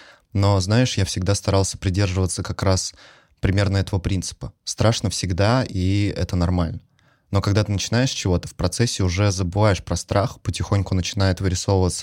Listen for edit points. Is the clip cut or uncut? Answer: uncut